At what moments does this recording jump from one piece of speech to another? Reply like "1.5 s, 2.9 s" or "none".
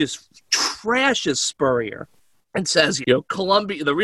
2.2 s, 3.0 s